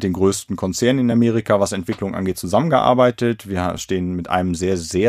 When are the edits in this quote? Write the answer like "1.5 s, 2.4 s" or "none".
none